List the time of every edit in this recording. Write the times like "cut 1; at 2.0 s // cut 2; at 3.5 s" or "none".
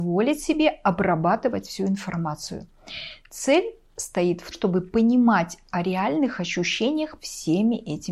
cut 1; at 4.5 s // cut 2; at 7.2 s